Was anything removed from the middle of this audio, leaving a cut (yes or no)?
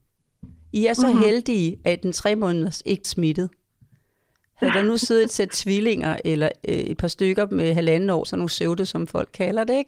yes